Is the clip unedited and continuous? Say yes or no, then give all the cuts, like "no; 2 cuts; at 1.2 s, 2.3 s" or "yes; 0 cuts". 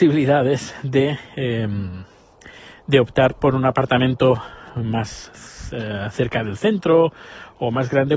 yes; 0 cuts